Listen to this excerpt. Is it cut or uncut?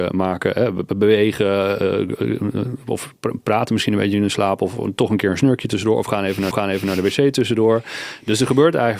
cut